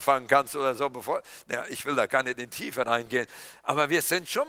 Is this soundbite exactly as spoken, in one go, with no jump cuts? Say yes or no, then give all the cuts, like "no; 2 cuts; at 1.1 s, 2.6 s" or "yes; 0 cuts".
yes; 0 cuts